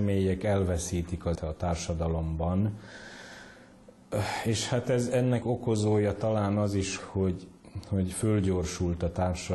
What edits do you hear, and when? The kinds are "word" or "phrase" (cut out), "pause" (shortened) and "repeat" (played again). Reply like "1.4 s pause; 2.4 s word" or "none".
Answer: 1.3 s word; 5.4 s word; 7.0 s word